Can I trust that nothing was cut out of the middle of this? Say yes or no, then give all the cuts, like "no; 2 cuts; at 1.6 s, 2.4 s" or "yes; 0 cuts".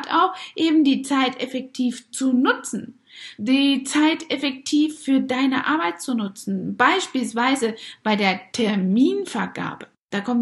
yes; 0 cuts